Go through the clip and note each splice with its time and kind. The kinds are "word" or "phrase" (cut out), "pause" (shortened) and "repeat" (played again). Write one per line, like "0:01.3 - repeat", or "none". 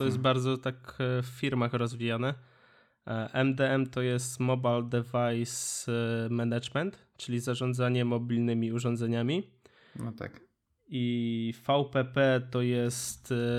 none